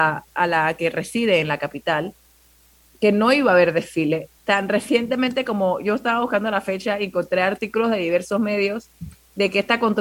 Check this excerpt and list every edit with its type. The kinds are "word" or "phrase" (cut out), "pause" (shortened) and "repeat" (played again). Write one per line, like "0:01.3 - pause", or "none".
0:04.4 - pause